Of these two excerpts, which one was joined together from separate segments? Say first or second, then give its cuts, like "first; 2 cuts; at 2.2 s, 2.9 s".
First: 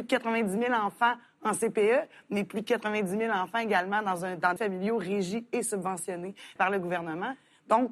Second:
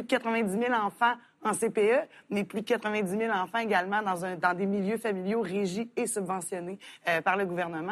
first; 2 cuts; at 4.6 s, 6.6 s